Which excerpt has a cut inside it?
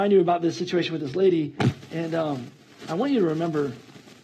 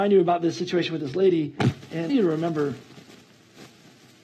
second; 1 cut; at 2.1 s

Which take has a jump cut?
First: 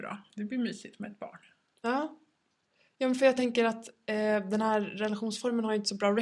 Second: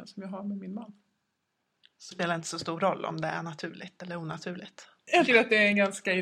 second; 2 cuts; at 2.1 s, 5.3 s

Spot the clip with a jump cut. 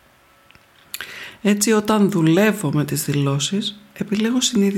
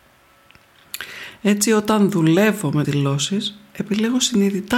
second; 1 cut; at 2.8 s

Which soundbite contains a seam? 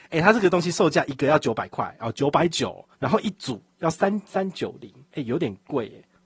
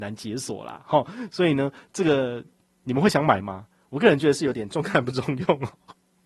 first; 1 cut; at 2.9 s

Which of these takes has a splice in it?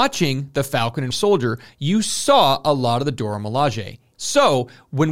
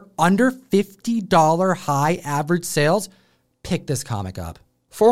first; 1 cut; at 1.1 s

